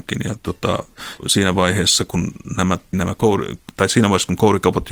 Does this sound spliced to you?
yes; 2 cuts; at 1.2 s, 2.9 s

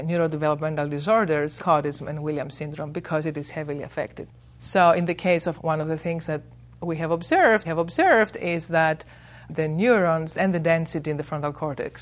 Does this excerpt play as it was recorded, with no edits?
no; 4 cuts; at 1.6 s, 5.6 s, 7.6 s, 10.3 s

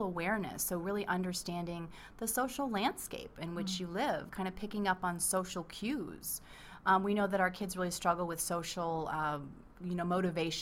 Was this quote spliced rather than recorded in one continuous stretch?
no; 0 cuts

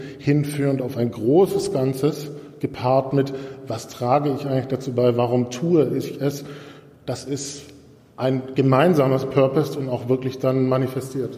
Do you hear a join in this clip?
no; 0 cuts

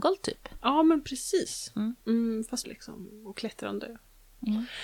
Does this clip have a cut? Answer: yes; 2 cuts; at 2.0 s, 2.6 s

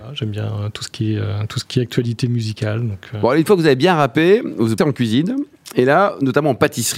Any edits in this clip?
yes; 1 cut; at 4.8 s

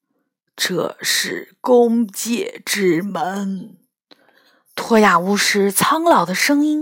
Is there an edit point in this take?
no; 0 cuts

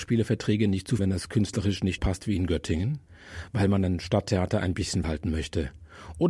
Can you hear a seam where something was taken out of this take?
yes; 3 cuts; at 1.0 s, 2.0 s, 5.0 s

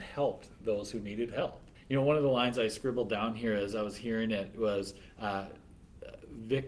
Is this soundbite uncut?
yes; 0 cuts

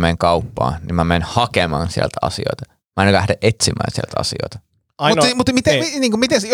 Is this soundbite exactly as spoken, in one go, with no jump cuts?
yes; 0 cuts

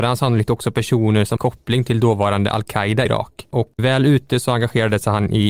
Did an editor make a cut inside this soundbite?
yes; 3 cuts; at 1.4 s, 3.1 s, 3.8 s

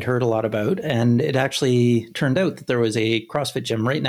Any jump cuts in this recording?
no; 0 cuts

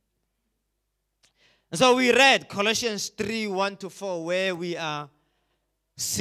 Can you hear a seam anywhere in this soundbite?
no; 0 cuts

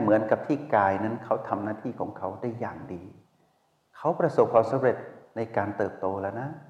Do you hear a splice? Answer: no; 0 cuts

